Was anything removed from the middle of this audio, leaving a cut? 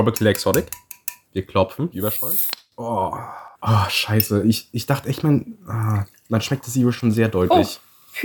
yes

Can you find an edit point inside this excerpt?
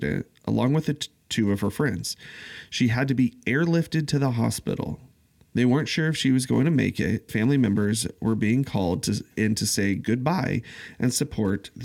yes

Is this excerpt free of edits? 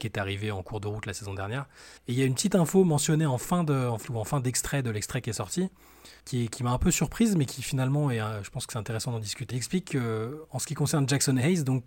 no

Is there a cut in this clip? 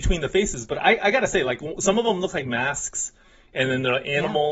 no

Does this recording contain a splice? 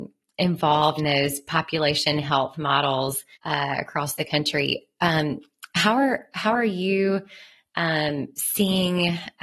yes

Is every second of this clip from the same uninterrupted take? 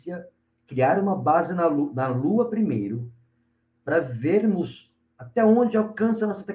yes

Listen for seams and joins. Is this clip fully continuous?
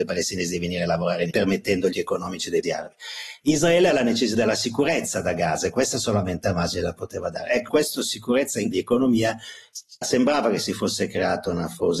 no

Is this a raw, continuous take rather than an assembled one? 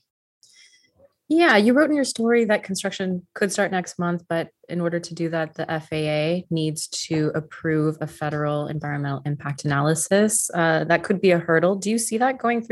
yes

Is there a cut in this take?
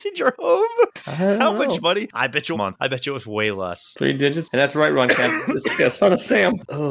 yes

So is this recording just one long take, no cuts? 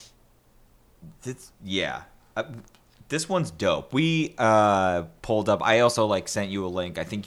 yes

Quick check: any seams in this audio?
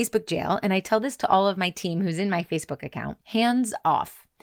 yes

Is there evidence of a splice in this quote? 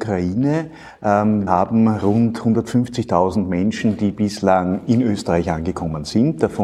yes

